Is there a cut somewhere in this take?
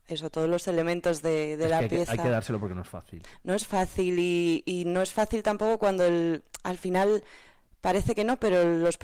no; 0 cuts

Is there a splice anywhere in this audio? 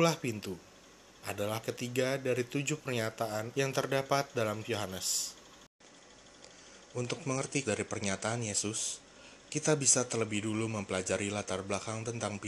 yes; 4 cuts; at 1.6 s, 3.5 s, 4.6 s, 7.6 s

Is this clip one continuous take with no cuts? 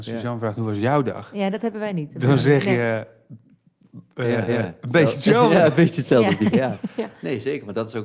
no; 2 cuts; at 4.5 s, 6.5 s

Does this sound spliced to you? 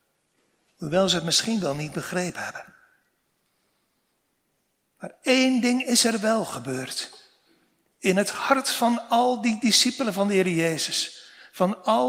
no; 0 cuts

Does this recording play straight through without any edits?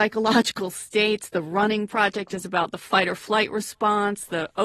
yes; 0 cuts

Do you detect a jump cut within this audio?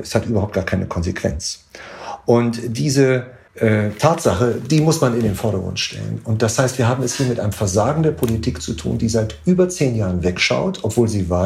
no; 0 cuts

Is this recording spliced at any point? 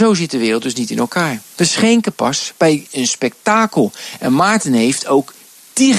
no; 0 cuts

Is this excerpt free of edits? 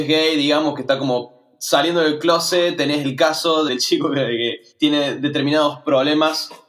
no; 2 cuts; at 3.7 s, 4.7 s

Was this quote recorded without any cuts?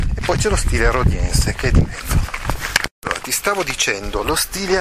yes; 0 cuts

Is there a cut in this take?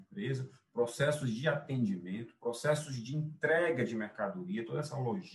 no; 0 cuts

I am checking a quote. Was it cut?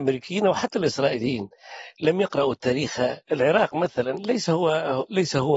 yes; 1 cut; at 3.3 s

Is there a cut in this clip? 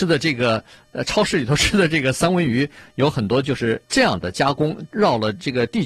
yes; 1 cut; at 3.9 s

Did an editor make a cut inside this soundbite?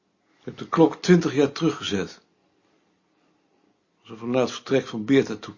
no; 0 cuts

